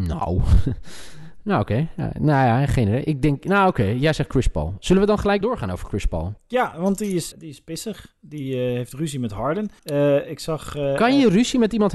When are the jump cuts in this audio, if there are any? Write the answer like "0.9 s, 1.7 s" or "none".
5.4 s, 6.4 s, 7.3 s, 9.8 s